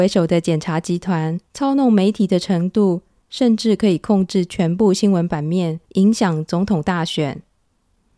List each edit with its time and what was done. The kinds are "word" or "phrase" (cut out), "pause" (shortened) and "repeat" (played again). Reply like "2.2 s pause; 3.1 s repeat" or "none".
1.5 s pause; 5.8 s pause